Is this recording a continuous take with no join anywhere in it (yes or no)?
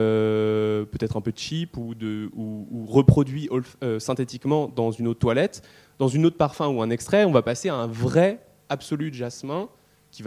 yes